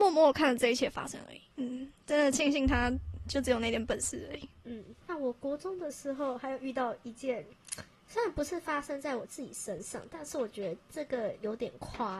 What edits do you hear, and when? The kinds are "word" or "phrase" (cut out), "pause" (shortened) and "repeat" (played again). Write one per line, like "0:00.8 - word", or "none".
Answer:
0:01.5 - pause
0:05.0 - pause